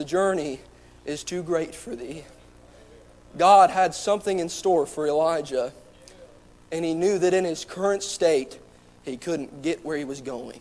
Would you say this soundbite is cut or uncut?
uncut